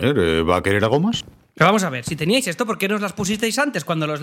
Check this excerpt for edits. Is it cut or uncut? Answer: uncut